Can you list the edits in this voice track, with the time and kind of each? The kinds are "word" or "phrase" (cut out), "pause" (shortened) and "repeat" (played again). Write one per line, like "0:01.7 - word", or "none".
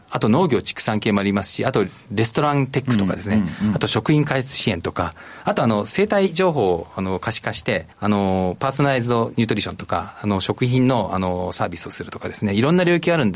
0:07.9 - pause

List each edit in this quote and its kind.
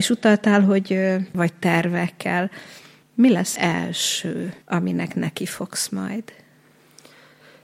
0:01.3 - word
0:03.0 - pause
0:03.6 - word
0:04.6 - pause

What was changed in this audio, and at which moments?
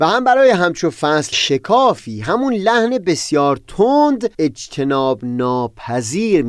0:01.3 - word
0:04.3 - pause

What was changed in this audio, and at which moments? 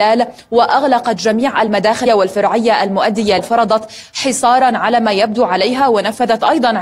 0:02.1 - word
0:03.4 - word

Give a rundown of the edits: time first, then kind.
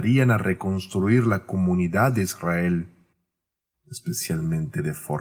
none

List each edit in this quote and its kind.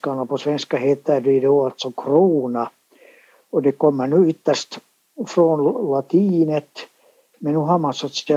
none

